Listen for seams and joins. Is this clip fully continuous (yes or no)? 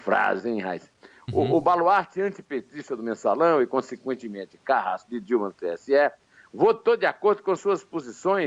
yes